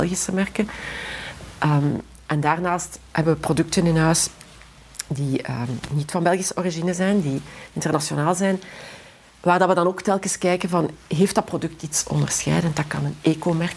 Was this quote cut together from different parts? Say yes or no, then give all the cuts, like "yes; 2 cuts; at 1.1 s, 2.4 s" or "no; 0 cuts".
no; 0 cuts